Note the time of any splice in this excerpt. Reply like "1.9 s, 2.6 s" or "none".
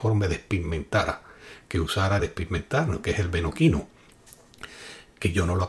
2.2 s